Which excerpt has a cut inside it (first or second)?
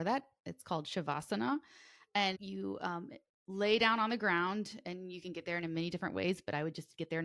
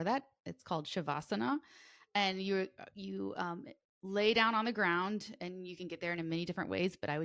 first